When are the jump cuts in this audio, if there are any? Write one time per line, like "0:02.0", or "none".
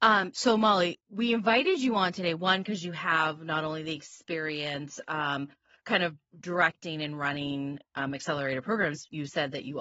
0:01.0